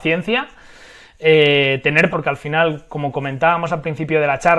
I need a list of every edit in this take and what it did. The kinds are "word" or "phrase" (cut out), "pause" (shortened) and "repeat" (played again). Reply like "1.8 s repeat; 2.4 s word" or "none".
2.1 s word